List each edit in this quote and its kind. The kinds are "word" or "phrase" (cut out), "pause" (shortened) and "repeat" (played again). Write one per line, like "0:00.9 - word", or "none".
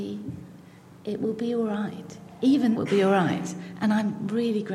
0:02.7 - word